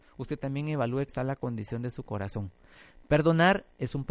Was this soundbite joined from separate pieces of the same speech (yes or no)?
yes